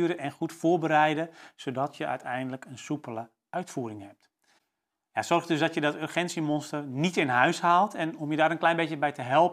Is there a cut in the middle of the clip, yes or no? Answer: no